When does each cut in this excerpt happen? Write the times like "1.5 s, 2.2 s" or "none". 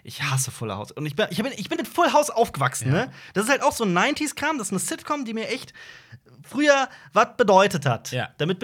1.8 s